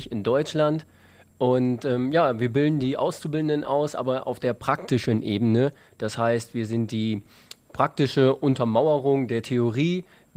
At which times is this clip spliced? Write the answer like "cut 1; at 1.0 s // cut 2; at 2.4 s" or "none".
none